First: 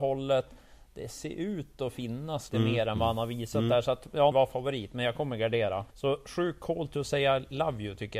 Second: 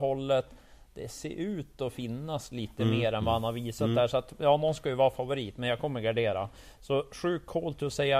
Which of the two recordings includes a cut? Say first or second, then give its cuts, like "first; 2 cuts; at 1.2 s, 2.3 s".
first; 3 cuts; at 2.5 s, 4.3 s, 5.9 s